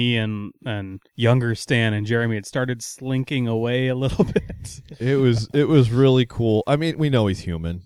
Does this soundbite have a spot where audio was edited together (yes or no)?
yes